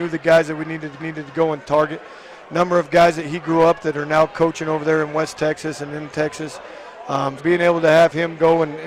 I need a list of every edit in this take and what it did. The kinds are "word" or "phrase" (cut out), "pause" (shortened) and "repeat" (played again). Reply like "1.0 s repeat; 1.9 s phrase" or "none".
1.0 s repeat; 7.4 s word